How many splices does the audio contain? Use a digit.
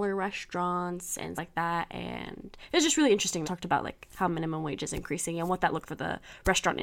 3